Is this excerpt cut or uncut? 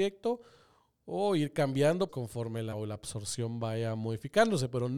cut